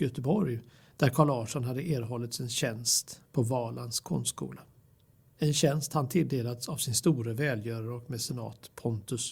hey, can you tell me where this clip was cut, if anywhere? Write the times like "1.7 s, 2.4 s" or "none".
none